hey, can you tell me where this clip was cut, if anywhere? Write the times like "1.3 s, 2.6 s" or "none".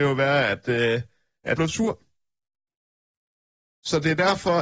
1.6 s